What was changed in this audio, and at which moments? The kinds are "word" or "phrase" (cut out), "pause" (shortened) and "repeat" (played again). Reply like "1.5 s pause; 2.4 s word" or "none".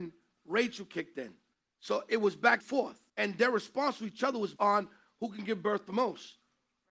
1.5 s pause; 2.6 s word; 3.1 s pause; 4.6 s word